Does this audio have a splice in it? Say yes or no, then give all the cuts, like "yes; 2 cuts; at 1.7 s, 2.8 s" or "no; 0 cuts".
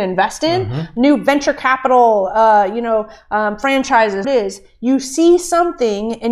yes; 1 cut; at 4.2 s